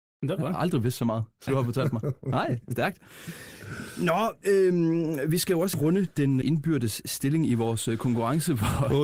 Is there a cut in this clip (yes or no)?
yes